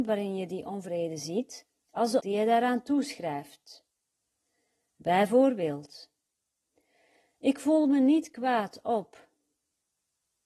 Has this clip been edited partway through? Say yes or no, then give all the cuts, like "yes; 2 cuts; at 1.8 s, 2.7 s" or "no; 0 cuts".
yes; 2 cuts; at 1.8 s, 2.2 s